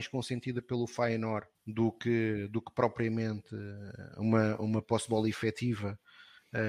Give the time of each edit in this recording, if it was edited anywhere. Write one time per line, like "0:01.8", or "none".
0:01.5